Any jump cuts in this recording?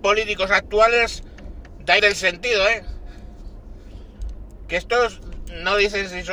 yes; 1 cut; at 2.0 s

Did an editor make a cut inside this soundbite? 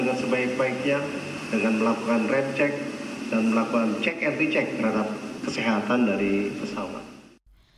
no; 0 cuts

